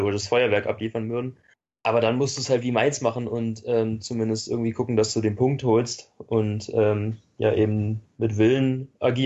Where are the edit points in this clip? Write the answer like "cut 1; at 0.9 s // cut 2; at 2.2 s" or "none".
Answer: cut 1; at 1.5 s

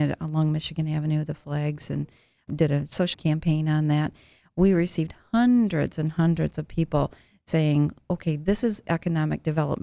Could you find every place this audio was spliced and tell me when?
cut 1; at 2.5 s // cut 2; at 3.1 s

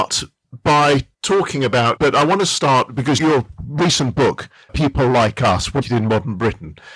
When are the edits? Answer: cut 1; at 1.1 s // cut 2; at 2.0 s // cut 3; at 3.2 s // cut 4; at 4.7 s // cut 5; at 5.8 s

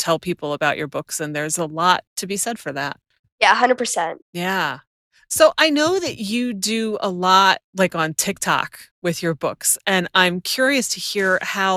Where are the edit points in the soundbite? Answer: cut 1; at 2.1 s // cut 2; at 3.2 s // cut 3; at 4.2 s // cut 4; at 7.7 s // cut 5; at 8.9 s

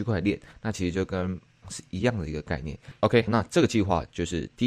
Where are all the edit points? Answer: cut 1; at 1.6 s // cut 2; at 3.3 s

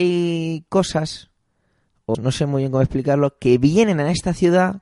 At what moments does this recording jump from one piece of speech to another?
cut 1; at 2.1 s

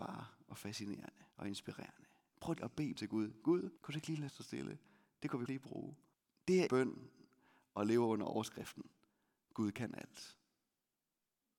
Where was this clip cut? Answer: cut 1; at 1.3 s // cut 2; at 2.6 s // cut 3; at 3.0 s // cut 4; at 3.8 s // cut 5; at 4.3 s // cut 6; at 5.5 s // cut 7; at 6.1 s // cut 8; at 6.7 s

